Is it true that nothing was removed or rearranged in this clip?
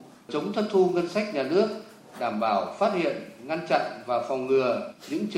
yes; 0 cuts

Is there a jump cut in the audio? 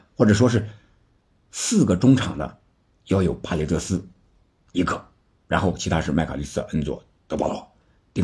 no; 0 cuts

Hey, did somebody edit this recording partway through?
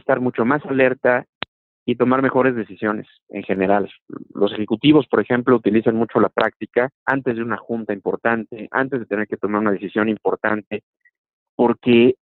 yes; 2 cuts; at 1.5 s, 7.0 s

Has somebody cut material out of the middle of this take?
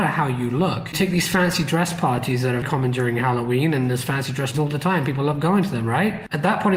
yes; 3 cuts; at 0.9 s, 2.6 s, 4.5 s

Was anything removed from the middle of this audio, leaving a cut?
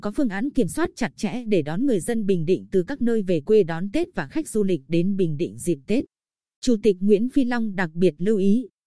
no; 0 cuts

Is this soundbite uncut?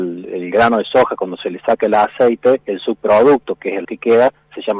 no; 1 cut; at 3.8 s

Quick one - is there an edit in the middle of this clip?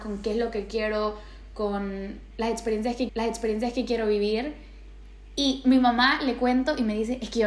yes; 1 cut; at 3.1 s

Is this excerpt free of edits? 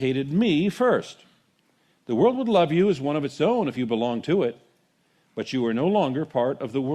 yes; 0 cuts

